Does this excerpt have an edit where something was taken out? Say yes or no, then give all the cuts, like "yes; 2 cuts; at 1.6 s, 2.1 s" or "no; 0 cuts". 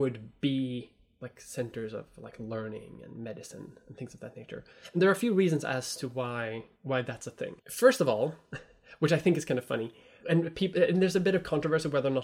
yes; 1 cut; at 7.6 s